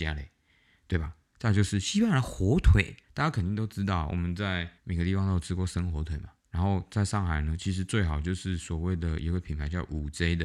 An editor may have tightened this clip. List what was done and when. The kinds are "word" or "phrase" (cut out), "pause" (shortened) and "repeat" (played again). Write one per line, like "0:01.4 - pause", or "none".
0:03.0 - pause
0:04.8 - pause
0:06.4 - pause